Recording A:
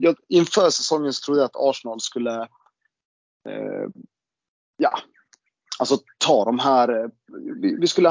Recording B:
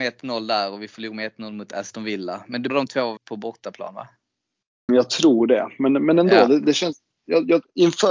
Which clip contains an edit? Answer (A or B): B